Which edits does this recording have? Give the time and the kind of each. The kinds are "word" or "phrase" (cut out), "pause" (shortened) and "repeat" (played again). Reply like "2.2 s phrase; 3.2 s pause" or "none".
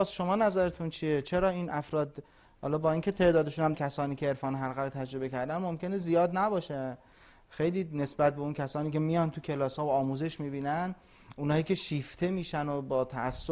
3.7 s phrase